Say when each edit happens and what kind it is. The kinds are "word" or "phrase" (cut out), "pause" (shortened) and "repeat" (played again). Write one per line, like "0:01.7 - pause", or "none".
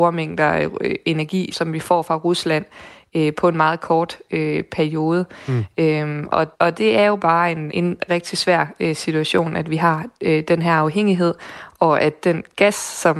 0:01.5 - word
0:06.5 - pause
0:07.7 - word
0:08.1 - word